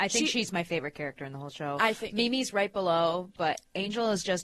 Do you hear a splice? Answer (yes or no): no